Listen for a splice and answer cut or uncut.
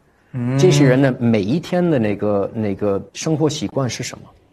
cut